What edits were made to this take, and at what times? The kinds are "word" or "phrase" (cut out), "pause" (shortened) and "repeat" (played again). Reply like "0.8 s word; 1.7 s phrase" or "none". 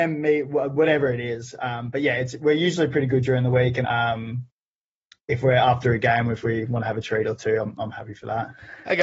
3.8 s word